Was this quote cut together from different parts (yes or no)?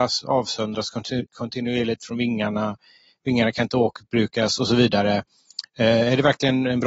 no